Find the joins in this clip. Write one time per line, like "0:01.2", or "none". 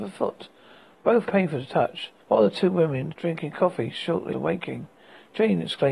0:01.3
0:02.2
0:03.1
0:04.3